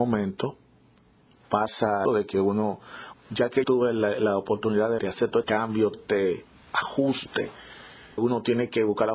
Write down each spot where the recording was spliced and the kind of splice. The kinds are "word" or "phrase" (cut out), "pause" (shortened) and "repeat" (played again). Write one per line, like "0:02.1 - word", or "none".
0:02.0 - word
0:03.1 - word
0:03.6 - word
0:05.0 - word
0:05.4 - word
0:05.9 - word
0:08.2 - word

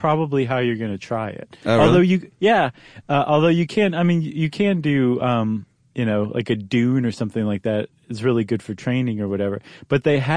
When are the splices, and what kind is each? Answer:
none

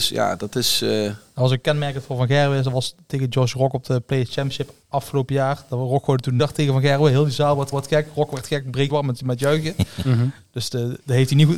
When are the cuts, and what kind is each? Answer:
0:04.8 - pause
0:06.4 - word
0:07.7 - repeat
0:08.9 - phrase

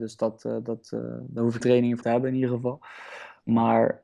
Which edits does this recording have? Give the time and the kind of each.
0:01.6 - word
0:02.0 - word

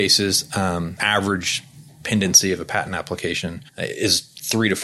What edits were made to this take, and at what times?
0:01.0 - word
0:03.7 - pause

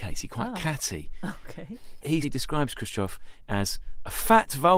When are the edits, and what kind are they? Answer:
0:02.2 - word

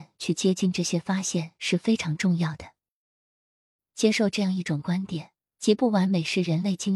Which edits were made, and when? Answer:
0:05.4 - pause

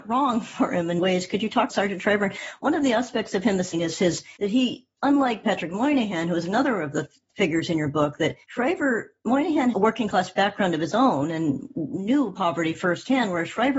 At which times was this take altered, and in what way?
0:01.0 - word
0:01.7 - word
0:03.7 - word
0:04.4 - pause
0:05.4 - word
0:08.4 - pause
0:09.7 - word

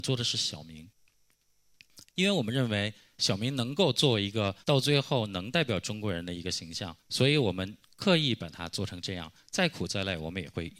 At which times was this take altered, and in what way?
0:04.6 - pause
0:07.0 - pause

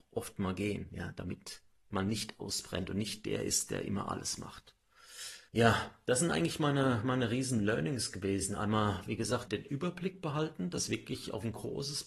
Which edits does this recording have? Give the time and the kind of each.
0:05.5 - pause
0:09.5 - word

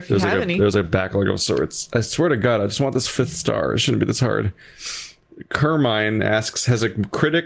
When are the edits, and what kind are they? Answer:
none

